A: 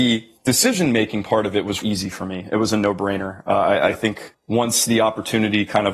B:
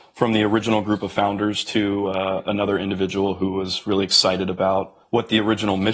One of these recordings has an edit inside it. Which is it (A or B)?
A